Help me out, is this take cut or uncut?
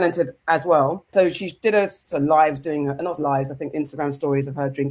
cut